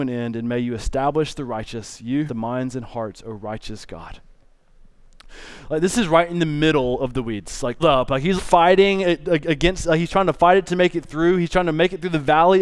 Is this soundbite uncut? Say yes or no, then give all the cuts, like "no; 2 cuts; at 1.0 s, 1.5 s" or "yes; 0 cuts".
no; 3 cuts; at 2.3 s, 7.8 s, 8.4 s